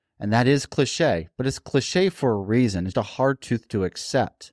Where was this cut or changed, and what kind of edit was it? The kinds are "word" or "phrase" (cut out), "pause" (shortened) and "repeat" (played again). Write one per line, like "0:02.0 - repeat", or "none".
0:02.9 - word